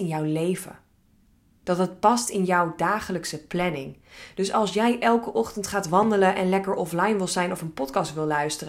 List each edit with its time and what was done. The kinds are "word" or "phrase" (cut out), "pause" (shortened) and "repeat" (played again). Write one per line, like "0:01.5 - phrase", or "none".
none